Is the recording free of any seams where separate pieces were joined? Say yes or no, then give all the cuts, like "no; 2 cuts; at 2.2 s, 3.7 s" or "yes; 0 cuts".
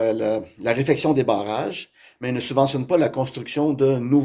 yes; 0 cuts